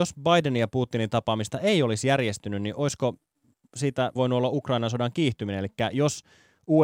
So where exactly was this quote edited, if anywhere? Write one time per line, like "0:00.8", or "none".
0:04.2